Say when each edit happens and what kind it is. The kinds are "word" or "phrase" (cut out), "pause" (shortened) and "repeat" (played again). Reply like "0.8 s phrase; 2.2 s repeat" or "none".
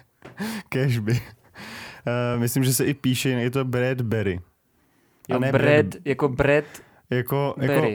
none